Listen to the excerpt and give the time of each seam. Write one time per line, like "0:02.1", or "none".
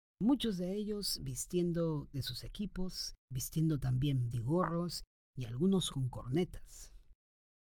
0:02.1
0:03.2
0:04.3
0:05.9